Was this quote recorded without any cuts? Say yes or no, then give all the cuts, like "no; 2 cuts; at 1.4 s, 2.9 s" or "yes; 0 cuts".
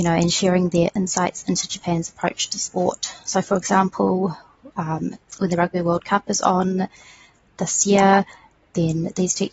yes; 0 cuts